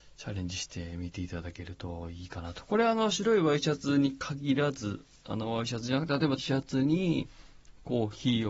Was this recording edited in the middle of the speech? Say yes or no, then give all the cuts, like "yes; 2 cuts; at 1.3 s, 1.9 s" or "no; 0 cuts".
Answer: yes; 1 cut; at 6.4 s